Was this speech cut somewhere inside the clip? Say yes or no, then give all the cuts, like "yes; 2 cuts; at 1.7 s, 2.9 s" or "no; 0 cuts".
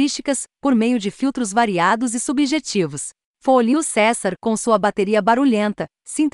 no; 0 cuts